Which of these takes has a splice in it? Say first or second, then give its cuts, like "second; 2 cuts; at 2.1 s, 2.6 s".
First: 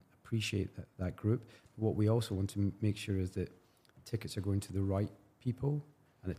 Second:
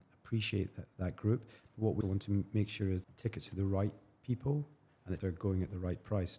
second; 4 cuts; at 2.0 s, 3.0 s, 3.5 s, 5.2 s